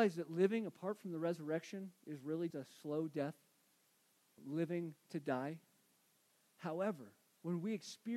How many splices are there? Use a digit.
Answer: 2